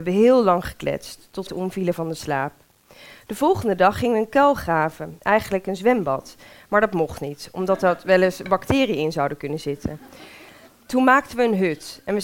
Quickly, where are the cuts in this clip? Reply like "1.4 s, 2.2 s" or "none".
1.5 s